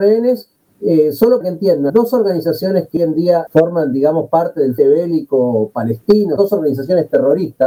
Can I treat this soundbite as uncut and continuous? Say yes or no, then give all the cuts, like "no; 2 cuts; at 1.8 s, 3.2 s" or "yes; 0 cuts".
no; 6 cuts; at 1.4 s, 1.9 s, 3.0 s, 3.5 s, 4.8 s, 6.4 s